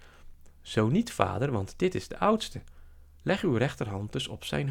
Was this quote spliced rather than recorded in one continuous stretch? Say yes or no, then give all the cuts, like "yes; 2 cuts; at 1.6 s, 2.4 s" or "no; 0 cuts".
no; 0 cuts